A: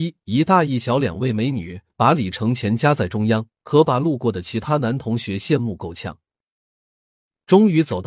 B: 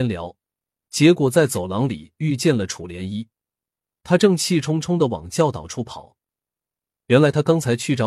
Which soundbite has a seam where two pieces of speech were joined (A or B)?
A